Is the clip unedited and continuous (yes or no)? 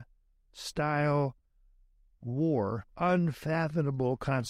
no